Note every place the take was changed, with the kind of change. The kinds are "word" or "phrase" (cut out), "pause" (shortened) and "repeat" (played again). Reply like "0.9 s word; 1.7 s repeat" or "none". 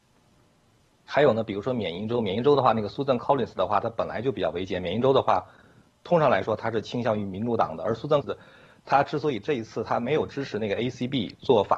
8.2 s word